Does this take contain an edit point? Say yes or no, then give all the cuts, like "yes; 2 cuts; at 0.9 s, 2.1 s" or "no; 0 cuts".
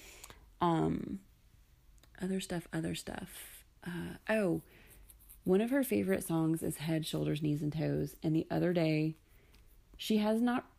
no; 0 cuts